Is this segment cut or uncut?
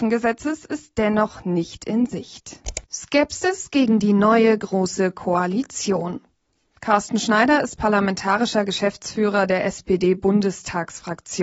uncut